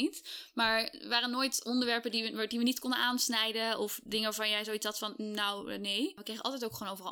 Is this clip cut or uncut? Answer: uncut